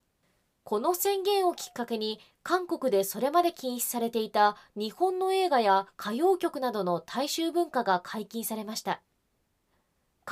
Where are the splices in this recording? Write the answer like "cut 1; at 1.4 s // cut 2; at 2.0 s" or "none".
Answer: none